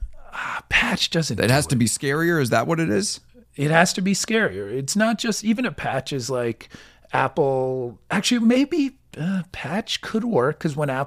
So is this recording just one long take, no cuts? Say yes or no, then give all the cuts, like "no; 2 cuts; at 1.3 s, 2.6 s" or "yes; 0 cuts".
yes; 0 cuts